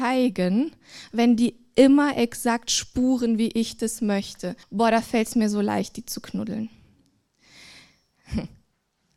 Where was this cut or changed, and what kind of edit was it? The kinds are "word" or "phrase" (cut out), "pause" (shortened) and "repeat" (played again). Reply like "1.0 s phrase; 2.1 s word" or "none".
4.6 s pause